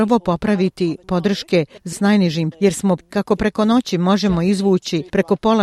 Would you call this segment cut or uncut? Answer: cut